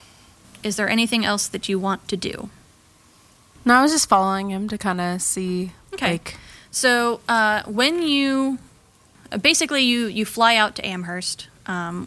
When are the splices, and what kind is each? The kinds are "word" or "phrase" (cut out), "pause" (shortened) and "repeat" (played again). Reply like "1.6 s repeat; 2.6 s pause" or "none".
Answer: none